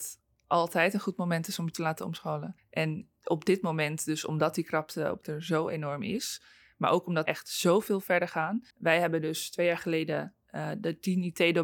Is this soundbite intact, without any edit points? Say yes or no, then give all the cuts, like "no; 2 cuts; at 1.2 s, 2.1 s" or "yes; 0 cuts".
no; 4 cuts; at 2.6 s, 5.2 s, 7.3 s, 8.7 s